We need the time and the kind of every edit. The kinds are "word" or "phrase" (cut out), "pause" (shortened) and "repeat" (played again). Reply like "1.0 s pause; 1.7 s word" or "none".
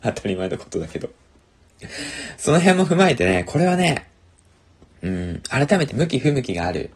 5.9 s word